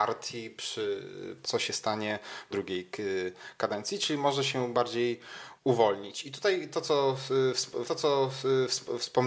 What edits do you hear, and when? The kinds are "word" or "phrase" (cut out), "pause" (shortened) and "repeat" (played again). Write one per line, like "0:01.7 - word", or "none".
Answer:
0:01.4 - phrase
0:02.5 - phrase
0:05.6 - pause
0:07.8 - repeat